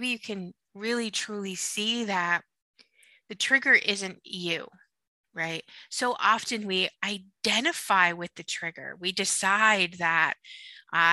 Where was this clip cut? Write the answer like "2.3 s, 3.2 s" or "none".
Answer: none